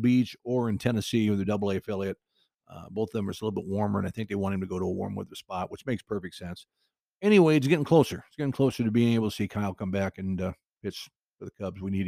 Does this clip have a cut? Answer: no; 0 cuts

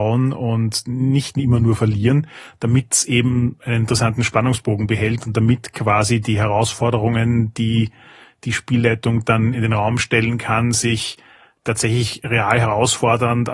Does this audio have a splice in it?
no; 0 cuts

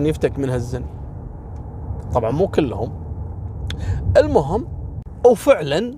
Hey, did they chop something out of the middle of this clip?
no; 0 cuts

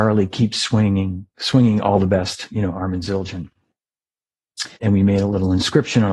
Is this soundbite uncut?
no; 2 cuts; at 1.3 s, 4.7 s

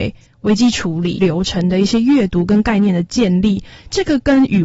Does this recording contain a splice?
yes; 1 cut; at 1.2 s

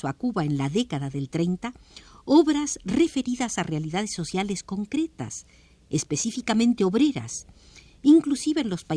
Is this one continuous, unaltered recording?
yes; 0 cuts

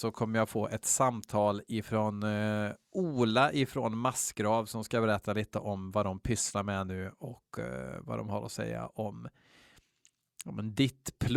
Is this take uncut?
yes; 0 cuts

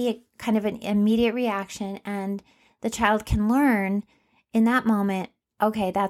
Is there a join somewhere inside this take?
no; 0 cuts

